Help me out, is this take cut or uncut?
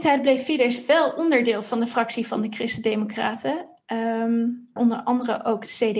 cut